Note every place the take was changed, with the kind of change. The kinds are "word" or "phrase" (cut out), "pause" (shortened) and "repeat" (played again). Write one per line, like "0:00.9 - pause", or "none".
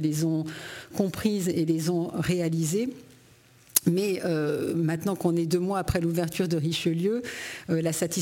none